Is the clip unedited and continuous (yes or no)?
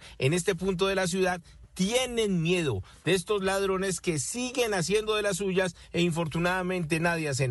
yes